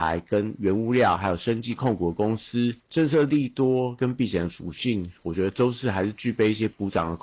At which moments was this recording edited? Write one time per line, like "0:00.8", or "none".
0:02.8